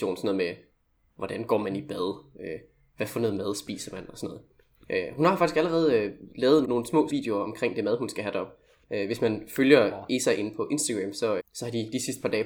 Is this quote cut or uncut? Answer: cut